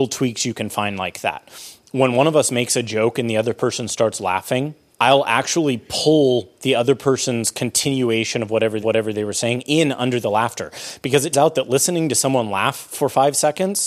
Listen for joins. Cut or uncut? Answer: cut